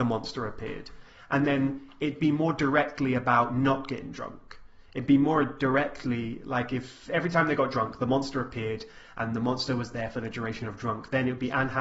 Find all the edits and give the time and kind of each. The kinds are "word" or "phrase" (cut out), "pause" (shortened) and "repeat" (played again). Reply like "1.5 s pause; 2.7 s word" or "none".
none